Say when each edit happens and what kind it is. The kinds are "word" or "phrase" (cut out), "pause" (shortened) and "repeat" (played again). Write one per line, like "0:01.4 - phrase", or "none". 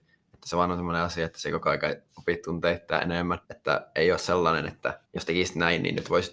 0:03.4 - pause
0:05.0 - pause